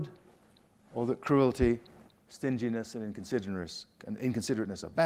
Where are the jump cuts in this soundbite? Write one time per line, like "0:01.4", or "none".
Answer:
none